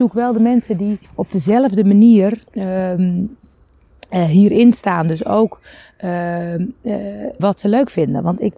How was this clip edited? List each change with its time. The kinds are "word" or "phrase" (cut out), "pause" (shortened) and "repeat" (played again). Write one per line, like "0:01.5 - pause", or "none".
0:01.0 - pause
0:02.5 - pause
0:07.4 - word